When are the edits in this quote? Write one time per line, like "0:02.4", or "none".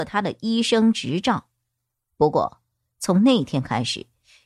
none